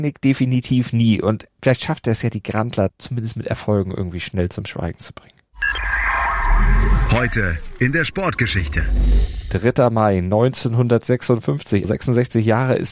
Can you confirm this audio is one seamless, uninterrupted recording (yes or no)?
no